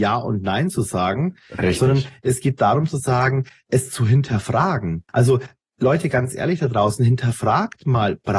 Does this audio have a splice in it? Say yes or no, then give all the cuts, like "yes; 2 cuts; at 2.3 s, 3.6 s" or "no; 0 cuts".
yes; 1 cut; at 5.1 s